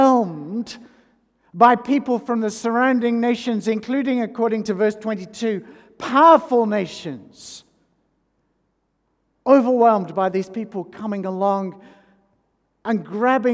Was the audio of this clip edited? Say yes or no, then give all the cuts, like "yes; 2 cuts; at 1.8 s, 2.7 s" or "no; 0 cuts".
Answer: no; 0 cuts